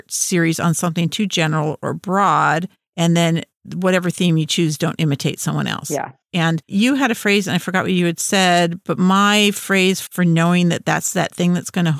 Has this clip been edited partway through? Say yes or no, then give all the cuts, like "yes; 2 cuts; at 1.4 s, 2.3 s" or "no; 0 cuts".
no; 0 cuts